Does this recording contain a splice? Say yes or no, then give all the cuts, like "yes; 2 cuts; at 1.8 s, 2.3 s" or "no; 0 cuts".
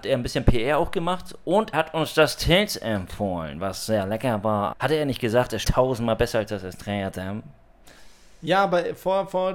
yes; 3 cuts; at 1.7 s, 4.7 s, 5.6 s